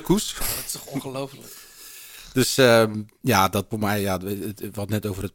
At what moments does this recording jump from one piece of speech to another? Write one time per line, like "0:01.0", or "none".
0:03.7